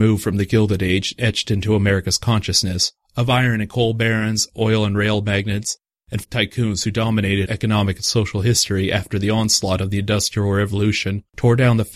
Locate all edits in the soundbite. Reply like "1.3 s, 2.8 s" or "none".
6.2 s, 7.5 s